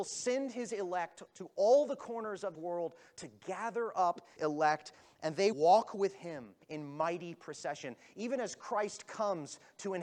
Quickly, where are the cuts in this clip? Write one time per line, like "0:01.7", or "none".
0:02.5
0:04.4
0:05.5
0:06.6